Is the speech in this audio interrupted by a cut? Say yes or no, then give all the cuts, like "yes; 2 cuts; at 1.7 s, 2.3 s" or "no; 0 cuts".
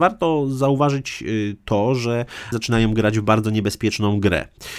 yes; 1 cut; at 2.5 s